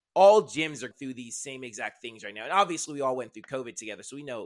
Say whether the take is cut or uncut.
cut